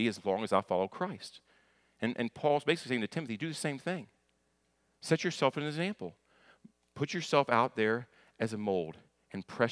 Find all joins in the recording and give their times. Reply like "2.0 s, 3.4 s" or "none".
none